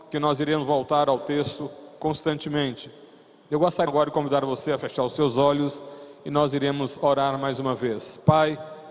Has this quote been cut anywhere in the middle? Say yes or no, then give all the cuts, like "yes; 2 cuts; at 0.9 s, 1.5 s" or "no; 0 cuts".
yes; 1 cut; at 3.9 s